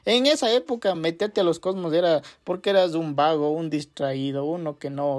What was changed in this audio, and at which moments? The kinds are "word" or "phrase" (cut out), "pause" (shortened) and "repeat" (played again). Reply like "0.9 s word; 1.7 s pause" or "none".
none

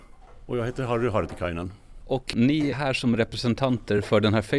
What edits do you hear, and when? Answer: 2.7 s word

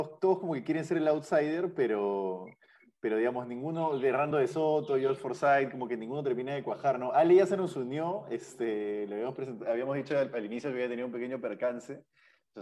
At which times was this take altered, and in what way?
none

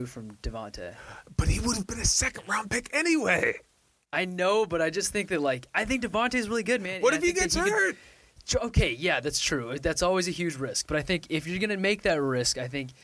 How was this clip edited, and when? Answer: none

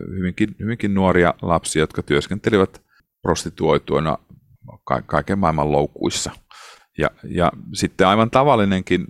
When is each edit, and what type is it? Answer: none

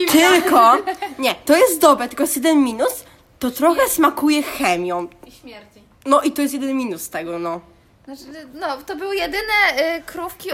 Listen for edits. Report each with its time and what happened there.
none

